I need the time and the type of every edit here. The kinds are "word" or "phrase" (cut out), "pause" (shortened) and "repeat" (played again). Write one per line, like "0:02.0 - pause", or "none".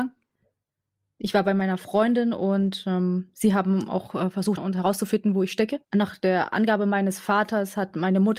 0:04.6 - word
0:05.8 - pause